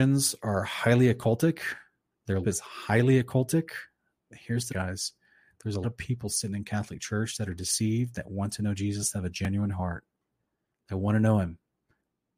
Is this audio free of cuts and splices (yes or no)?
no